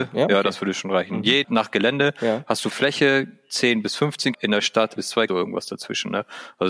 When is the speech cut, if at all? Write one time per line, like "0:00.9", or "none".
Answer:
0:01.4
0:02.7
0:04.3
0:05.0
0:05.3